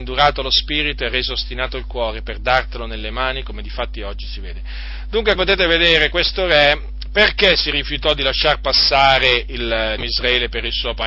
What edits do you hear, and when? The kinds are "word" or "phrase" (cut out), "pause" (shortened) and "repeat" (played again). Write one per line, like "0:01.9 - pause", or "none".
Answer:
0:05.4 - word
0:10.0 - word

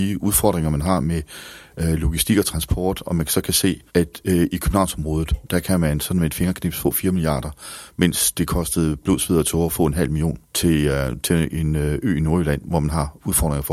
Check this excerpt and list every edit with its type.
0:03.9 - pause
0:10.4 - pause

